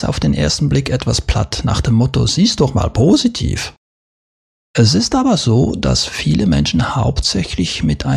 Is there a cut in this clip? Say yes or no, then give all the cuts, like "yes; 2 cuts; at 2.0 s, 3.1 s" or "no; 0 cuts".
no; 0 cuts